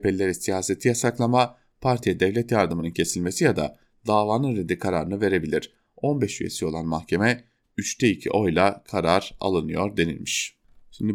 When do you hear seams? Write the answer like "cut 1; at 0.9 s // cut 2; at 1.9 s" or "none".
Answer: none